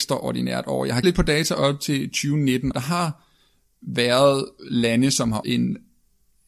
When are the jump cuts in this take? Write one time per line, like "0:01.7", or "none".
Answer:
0:01.0
0:02.7
0:05.4